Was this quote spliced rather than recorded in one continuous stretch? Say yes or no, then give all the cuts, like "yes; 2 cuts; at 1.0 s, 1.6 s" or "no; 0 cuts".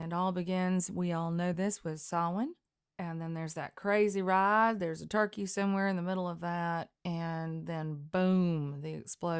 no; 0 cuts